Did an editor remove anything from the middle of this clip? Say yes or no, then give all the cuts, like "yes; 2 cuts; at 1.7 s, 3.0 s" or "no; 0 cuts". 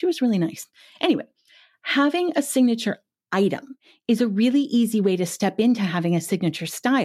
no; 0 cuts